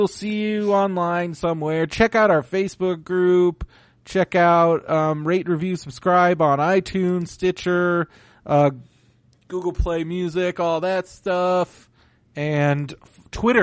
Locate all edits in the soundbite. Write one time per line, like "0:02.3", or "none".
none